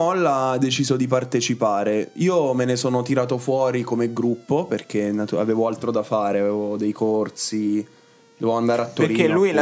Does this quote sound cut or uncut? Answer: uncut